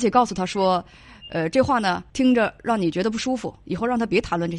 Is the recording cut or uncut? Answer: cut